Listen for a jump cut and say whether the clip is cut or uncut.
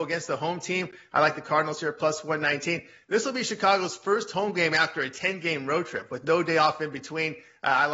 uncut